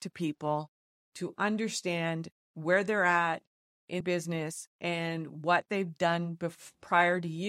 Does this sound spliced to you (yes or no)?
yes